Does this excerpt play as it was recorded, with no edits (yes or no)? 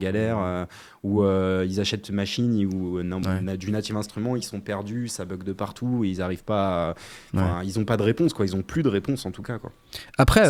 yes